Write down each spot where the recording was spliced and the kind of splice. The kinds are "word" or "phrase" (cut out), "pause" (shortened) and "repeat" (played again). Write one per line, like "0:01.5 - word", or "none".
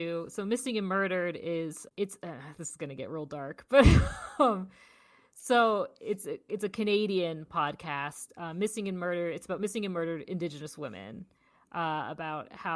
none